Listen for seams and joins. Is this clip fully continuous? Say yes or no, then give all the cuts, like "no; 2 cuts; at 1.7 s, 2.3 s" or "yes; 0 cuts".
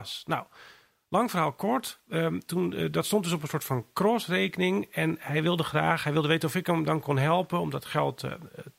yes; 0 cuts